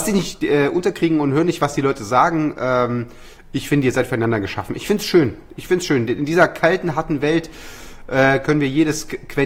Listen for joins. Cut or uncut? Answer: uncut